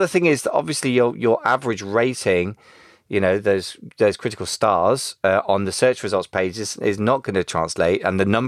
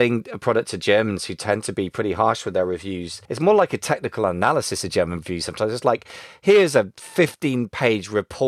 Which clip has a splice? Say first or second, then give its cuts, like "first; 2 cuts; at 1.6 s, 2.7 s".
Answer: second; 1 cut; at 3.3 s